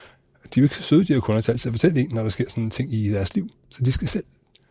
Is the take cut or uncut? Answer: uncut